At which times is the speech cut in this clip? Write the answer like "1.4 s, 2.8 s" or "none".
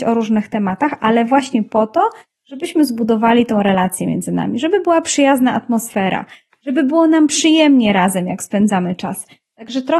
none